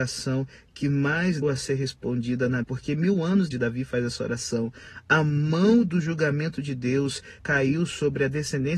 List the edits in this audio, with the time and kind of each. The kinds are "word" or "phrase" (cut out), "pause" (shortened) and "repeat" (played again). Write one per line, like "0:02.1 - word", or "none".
0:01.4 - word
0:02.6 - word
0:03.5 - word
0:07.4 - word

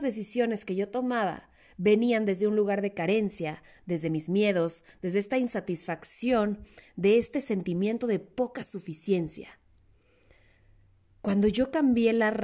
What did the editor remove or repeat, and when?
none

